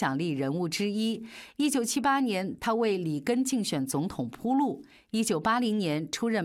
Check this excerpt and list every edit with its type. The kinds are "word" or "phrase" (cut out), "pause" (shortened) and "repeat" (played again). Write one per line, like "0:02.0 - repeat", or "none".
none